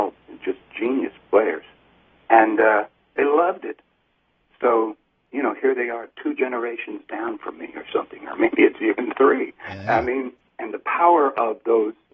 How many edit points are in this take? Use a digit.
0